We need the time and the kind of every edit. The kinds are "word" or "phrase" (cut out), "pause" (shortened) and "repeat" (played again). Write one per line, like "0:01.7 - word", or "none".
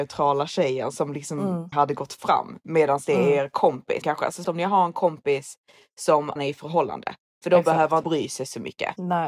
0:01.7 - word
0:04.0 - word
0:04.4 - word
0:06.4 - word
0:08.0 - word